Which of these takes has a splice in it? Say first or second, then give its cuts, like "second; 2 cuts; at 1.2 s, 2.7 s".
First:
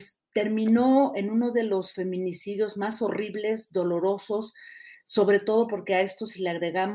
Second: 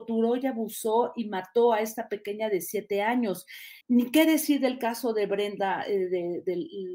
second; 1 cut; at 3.8 s